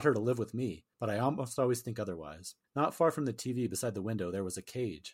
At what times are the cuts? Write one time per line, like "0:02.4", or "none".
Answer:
0:00.9
0:02.6

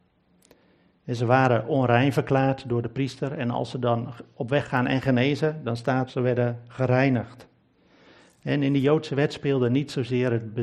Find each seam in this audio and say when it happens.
0:06.1

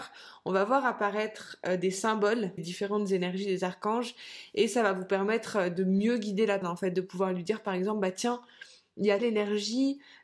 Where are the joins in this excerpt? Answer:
0:02.6
0:06.6
0:09.2

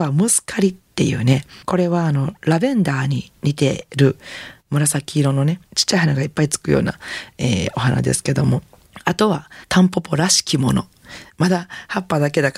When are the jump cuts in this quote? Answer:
0:01.6
0:09.6

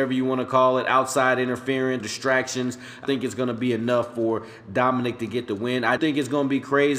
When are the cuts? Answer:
0:02.0
0:03.1
0:06.0

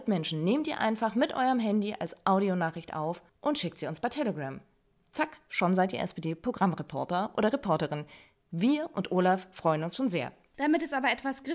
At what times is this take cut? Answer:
0:03.3

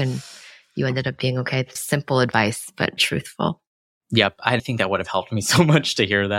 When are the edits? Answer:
0:01.8
0:03.0
0:04.6

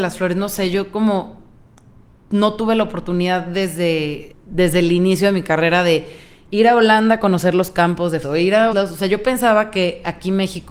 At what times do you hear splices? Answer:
0:04.3
0:08.2
0:08.7

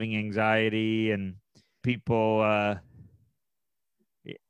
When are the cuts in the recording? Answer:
0:01.8

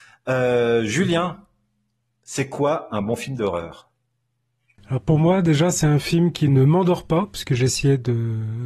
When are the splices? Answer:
none

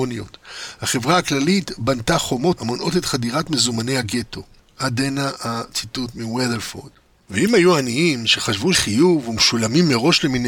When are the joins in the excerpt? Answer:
0:02.6
0:08.7

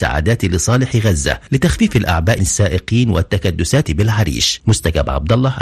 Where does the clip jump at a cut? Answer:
0:02.4
0:03.8

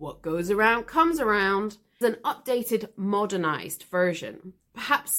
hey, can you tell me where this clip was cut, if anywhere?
0:02.0

